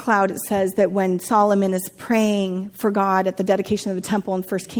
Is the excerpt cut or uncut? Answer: uncut